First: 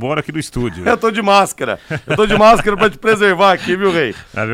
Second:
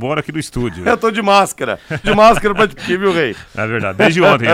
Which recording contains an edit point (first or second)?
second